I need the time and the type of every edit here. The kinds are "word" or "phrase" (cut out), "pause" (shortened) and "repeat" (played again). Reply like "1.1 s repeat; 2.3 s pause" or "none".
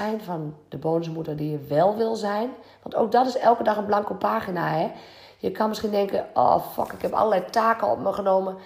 none